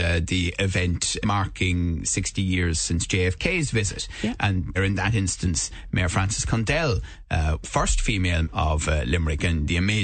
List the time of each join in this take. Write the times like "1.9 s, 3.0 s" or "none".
1.2 s, 4.7 s, 7.6 s, 8.4 s